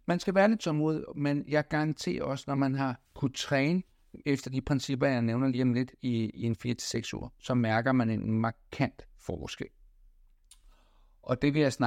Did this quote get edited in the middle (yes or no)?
yes